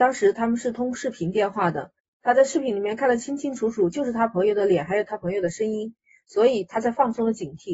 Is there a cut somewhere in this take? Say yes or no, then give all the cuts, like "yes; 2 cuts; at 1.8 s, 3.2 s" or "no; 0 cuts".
no; 0 cuts